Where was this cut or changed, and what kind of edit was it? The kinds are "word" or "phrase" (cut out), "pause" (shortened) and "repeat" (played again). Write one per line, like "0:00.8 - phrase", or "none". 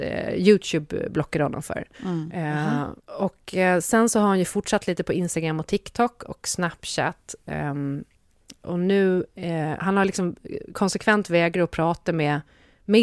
0:01.9 - pause
0:03.0 - pause